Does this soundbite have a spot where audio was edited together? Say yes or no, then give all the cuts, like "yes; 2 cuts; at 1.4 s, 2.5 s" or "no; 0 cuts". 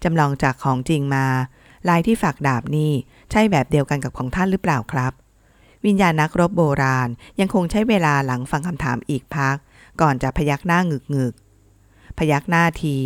no; 0 cuts